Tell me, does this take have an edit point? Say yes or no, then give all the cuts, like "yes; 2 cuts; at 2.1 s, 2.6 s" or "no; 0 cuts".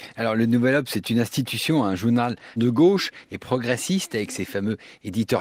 yes; 1 cut; at 2.6 s